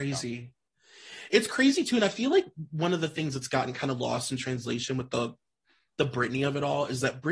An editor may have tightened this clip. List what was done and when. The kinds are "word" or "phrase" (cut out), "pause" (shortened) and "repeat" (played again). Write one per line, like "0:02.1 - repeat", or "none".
none